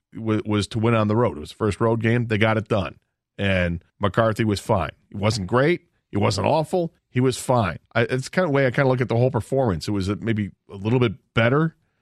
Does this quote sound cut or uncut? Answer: cut